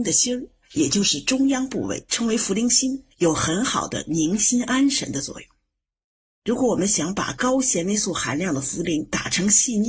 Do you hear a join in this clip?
yes; 1 cut; at 3.1 s

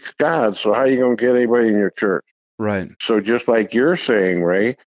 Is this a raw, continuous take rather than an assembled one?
no; 1 cut; at 2.9 s

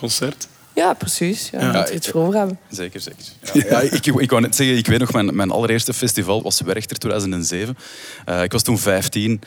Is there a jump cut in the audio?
yes; 1 cut; at 6.4 s

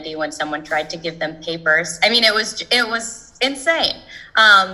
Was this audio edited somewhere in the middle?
no; 0 cuts

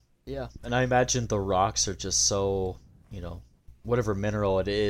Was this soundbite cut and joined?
no; 0 cuts

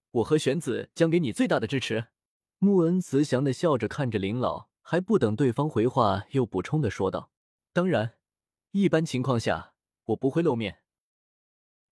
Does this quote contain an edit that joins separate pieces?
yes; 3 cuts; at 2.3 s, 4.7 s, 7.4 s

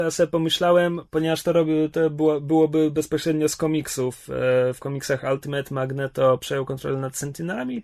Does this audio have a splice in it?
no; 0 cuts

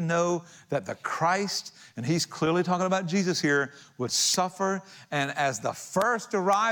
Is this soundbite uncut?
yes; 0 cuts

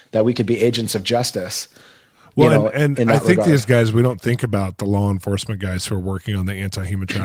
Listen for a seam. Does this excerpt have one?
no; 0 cuts

